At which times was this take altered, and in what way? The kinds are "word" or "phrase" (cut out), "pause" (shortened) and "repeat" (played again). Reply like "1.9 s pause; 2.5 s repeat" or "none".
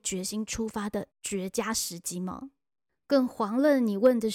none

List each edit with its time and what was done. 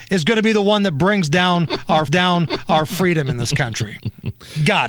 2.1 s repeat

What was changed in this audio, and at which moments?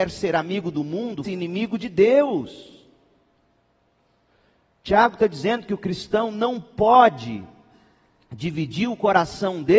1.2 s word

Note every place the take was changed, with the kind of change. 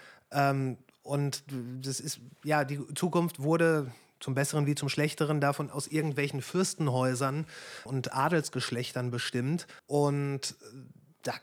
7.9 s word; 9.8 s pause

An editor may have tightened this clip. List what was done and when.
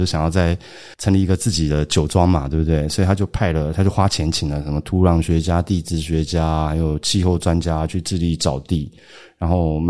0.9 s pause

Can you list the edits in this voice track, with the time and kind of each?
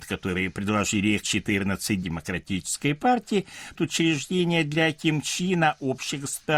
1.2 s word; 2.0 s phrase; 3.7 s word

